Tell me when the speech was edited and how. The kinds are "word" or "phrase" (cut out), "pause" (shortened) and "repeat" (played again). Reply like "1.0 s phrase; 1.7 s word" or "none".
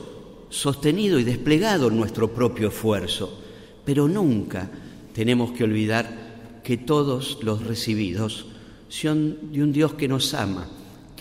7.6 s word